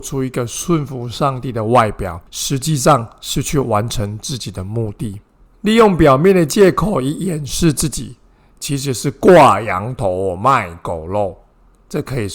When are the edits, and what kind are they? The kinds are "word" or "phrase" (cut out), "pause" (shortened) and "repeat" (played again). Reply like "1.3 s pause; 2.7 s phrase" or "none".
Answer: 2.3 s pause; 5.5 s pause